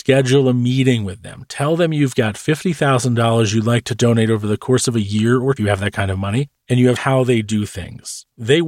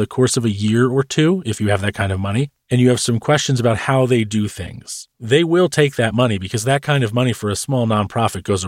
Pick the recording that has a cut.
first; 2 cuts; at 5.6 s, 7.0 s

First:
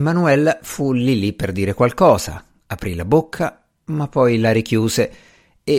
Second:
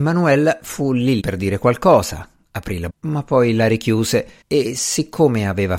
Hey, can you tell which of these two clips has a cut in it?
second; 3 cuts; at 1.2 s, 2.9 s, 4.4 s

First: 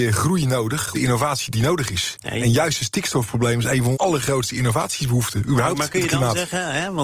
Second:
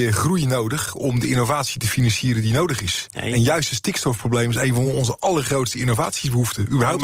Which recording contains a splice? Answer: first; 3 cuts; at 0.9 s, 1.5 s, 3.9 s

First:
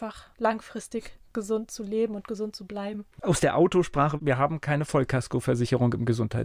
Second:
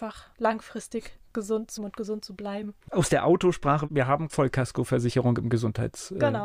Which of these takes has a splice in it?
second; 2 cuts; at 1.8 s, 4.3 s

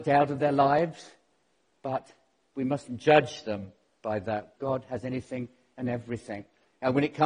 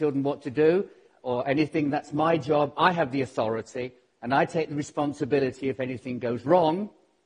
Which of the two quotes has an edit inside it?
first; 1 cut; at 4.6 s

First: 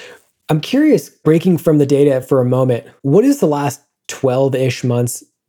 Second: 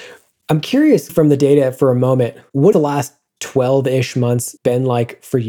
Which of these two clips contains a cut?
second; 3 cuts; at 1.1 s, 2.7 s, 4.6 s

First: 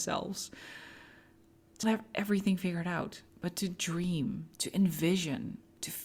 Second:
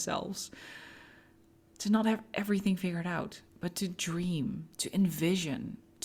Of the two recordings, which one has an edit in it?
first; 1 cut; at 1.8 s

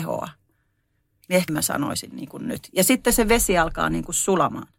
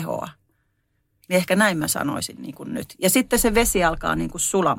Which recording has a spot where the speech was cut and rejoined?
first; 1 cut; at 1.5 s

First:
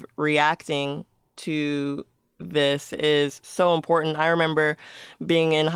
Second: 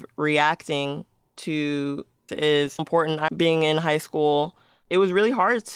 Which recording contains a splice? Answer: second; 3 cuts; at 2.3 s, 2.8 s, 3.3 s

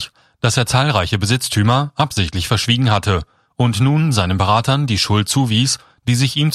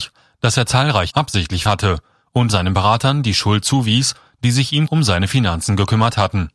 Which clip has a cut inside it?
second; 4 cuts; at 1.1 s, 1.7 s, 2.5 s, 4.9 s

